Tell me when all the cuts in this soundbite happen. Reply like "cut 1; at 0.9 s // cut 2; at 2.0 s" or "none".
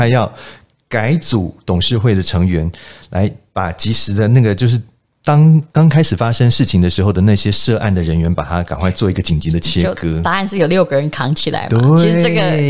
cut 1; at 5.7 s